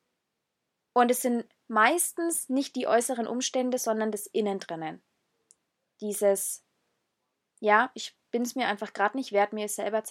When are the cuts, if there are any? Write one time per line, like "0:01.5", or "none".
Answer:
none